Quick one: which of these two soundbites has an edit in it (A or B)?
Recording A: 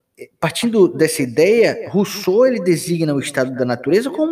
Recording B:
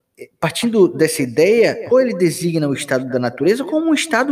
B